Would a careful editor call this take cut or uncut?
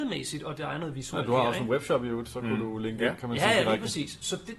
uncut